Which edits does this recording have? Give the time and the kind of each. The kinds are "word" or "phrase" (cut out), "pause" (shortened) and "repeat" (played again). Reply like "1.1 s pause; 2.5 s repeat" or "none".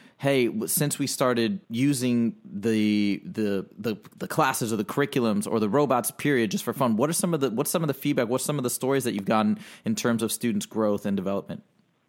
1.6 s pause; 3.7 s pause